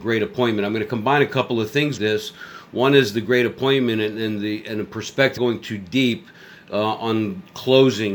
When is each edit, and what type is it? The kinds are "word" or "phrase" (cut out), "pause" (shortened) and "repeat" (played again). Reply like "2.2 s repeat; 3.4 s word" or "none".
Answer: 2.0 s word; 5.4 s word